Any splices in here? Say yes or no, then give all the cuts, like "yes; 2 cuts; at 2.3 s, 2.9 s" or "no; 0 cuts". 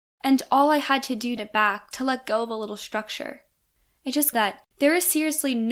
yes; 4 cuts; at 1.4 s, 1.9 s, 4.3 s, 4.7 s